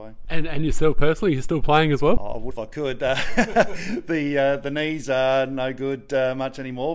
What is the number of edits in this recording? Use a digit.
0